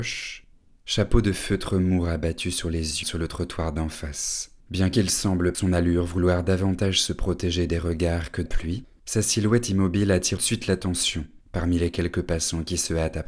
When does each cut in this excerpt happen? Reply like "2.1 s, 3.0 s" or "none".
3.0 s, 4.6 s, 5.5 s, 8.5 s, 8.9 s, 10.4 s, 11.4 s